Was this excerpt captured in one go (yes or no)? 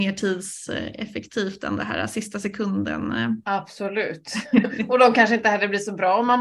yes